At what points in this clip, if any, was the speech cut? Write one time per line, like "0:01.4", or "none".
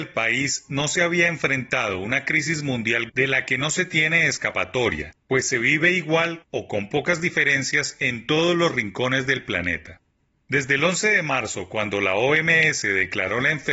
0:03.1